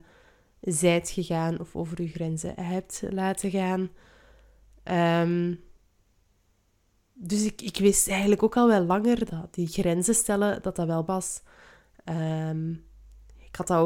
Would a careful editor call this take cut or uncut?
cut